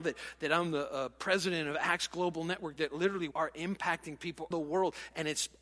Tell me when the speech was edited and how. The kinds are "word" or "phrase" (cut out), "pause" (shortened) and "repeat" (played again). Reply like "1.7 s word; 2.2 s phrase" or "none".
3.3 s word; 4.5 s word